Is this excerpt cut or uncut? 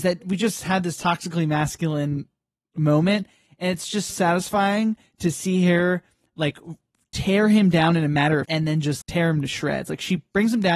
cut